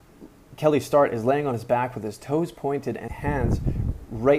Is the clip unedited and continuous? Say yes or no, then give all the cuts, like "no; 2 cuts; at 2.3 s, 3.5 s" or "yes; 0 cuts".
no; 1 cut; at 3.1 s